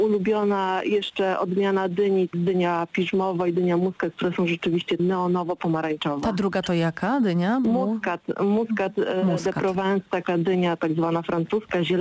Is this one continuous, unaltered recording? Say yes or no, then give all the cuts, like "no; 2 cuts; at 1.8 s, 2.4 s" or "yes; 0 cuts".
no; 3 cuts; at 2.3 s, 5.0 s, 10.1 s